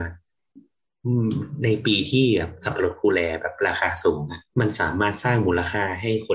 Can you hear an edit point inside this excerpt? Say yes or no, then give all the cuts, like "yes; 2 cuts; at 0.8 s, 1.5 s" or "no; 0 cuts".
yes; 1 cut; at 4.5 s